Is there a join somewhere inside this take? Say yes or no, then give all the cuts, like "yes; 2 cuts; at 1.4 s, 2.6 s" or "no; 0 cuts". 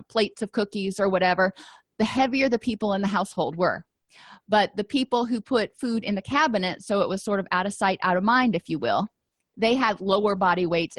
no; 0 cuts